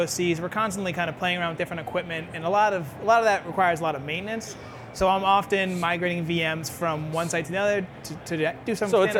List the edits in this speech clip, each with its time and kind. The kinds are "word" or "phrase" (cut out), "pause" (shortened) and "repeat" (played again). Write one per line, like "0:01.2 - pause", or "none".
none